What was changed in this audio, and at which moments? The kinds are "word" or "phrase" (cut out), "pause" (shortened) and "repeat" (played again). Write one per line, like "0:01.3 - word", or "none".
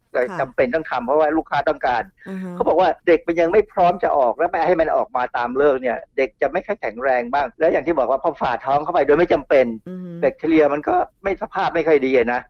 0:03.0 - pause
0:07.5 - pause
0:11.1 - pause